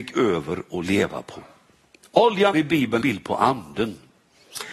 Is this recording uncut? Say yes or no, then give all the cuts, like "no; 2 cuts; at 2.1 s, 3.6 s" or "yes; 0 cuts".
no; 2 cuts; at 2.5 s, 3.0 s